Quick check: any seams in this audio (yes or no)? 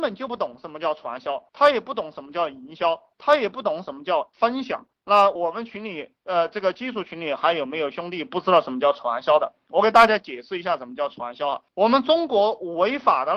yes